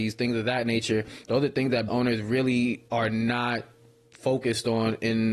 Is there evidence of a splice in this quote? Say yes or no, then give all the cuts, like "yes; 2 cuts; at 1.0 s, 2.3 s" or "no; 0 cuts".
yes; 2 cuts; at 1.9 s, 2.9 s